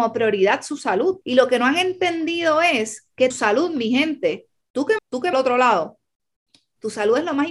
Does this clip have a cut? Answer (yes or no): yes